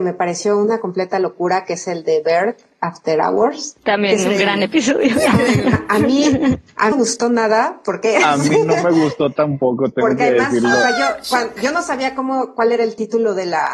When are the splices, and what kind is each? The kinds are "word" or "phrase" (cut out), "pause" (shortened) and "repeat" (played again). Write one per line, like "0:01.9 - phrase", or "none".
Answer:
0:03.8 - pause
0:06.9 - phrase